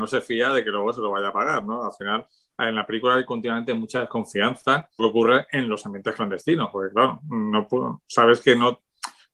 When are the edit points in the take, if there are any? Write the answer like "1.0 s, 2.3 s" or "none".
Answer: 5.0 s